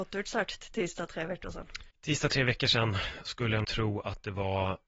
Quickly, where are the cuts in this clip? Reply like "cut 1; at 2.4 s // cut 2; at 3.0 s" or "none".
cut 1; at 1.9 s // cut 2; at 3.6 s